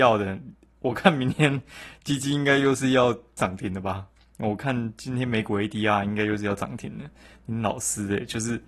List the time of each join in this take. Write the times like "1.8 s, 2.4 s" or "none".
none

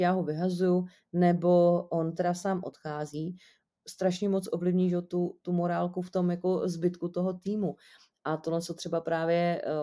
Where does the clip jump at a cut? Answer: none

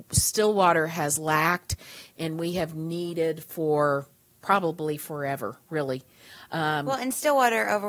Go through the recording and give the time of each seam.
none

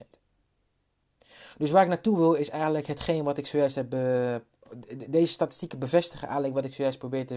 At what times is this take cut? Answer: none

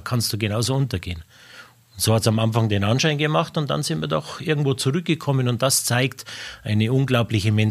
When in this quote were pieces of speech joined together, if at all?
none

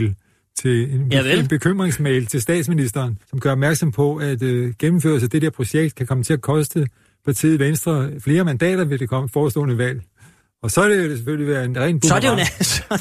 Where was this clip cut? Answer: none

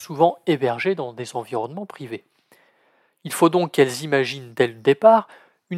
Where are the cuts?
none

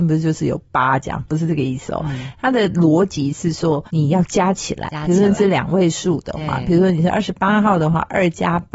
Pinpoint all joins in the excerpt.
3.9 s

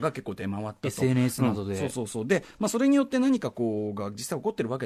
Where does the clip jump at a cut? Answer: none

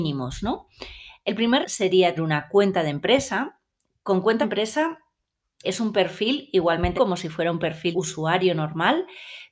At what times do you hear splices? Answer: 1.6 s, 2.2 s, 4.4 s, 5.6 s, 7.0 s, 7.9 s

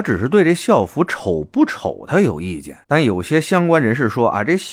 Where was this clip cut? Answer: 2.8 s

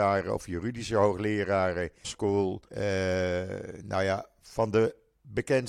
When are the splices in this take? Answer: 2.0 s, 2.7 s

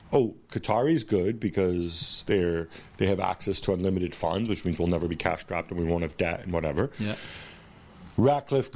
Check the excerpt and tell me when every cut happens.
none

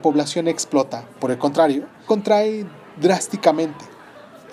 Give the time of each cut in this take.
1.2 s, 2.1 s

